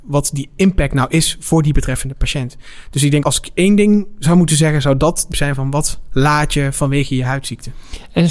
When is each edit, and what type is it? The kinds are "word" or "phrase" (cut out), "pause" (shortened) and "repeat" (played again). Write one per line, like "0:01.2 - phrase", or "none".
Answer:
0:03.2 - word
0:05.3 - word